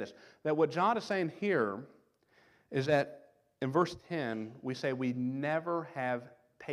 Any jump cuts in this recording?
no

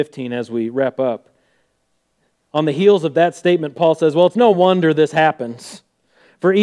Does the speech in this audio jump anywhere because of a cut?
no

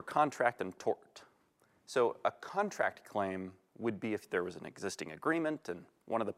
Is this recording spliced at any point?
no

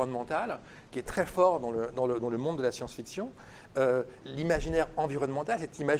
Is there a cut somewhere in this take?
yes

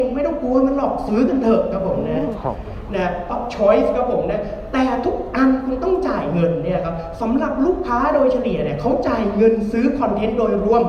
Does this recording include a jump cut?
yes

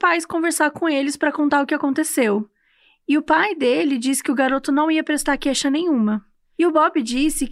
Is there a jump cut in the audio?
no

